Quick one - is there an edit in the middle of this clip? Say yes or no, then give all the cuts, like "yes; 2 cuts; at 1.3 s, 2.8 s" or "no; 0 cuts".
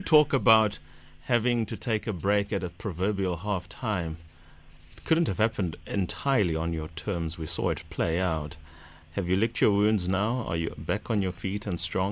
no; 0 cuts